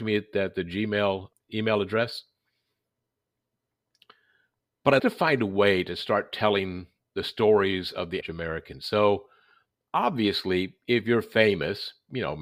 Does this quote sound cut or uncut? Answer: cut